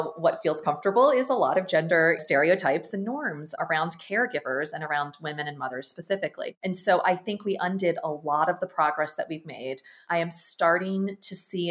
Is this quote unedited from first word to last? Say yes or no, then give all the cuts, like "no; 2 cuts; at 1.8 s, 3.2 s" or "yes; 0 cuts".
yes; 0 cuts